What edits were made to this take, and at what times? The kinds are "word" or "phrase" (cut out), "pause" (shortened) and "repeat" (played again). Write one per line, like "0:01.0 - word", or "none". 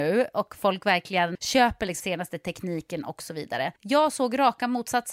0:01.3 - word
0:02.0 - word
0:03.8 - pause